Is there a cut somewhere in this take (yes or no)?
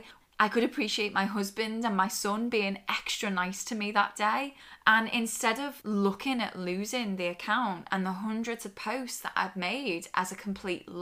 no